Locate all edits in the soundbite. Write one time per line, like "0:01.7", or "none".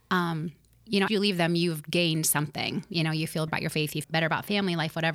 0:01.1
0:03.5
0:04.0